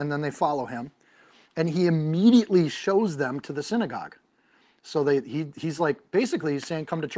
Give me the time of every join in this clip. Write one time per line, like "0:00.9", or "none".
none